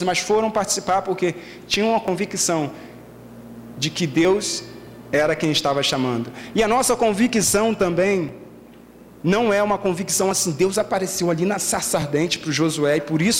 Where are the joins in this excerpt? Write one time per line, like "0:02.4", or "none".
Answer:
none